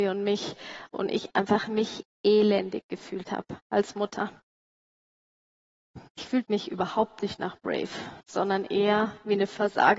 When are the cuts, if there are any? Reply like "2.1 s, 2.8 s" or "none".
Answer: 6.1 s, 8.2 s